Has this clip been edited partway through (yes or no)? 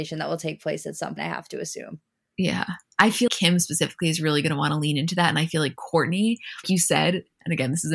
yes